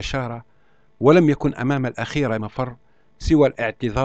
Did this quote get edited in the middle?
yes; 1 cut; at 2.4 s

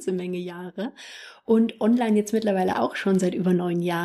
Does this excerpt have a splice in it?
no; 0 cuts

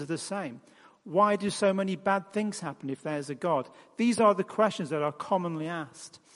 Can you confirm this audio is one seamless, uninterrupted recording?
yes; 0 cuts

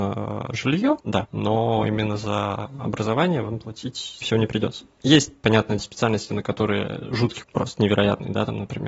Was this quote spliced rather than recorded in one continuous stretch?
yes; 4 cuts; at 1.0 s, 4.2 s, 5.8 s, 7.4 s

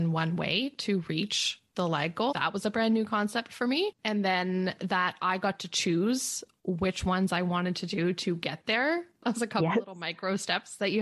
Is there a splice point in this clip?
yes; 2 cuts; at 2.3 s, 4.0 s

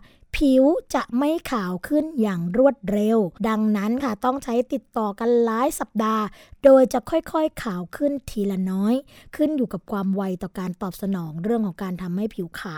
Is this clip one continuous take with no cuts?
no; 1 cut; at 3.4 s

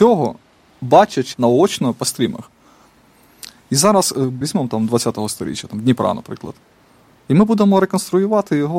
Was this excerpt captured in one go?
no; 2 cuts; at 1.3 s, 4.4 s

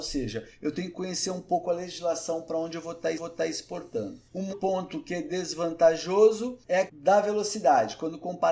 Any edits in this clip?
yes; 3 cuts; at 3.2 s, 4.5 s, 6.9 s

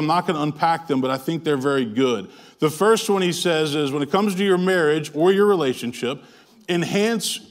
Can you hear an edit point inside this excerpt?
no; 0 cuts

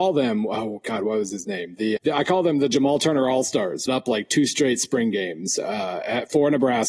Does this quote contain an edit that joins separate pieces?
yes; 2 cuts; at 2.0 s, 3.9 s

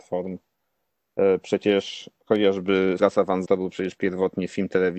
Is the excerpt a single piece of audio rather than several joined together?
no; 2 cuts; at 3.0 s, 3.5 s

